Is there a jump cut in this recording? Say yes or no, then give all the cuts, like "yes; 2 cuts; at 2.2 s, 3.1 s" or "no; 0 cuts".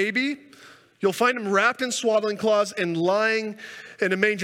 no; 0 cuts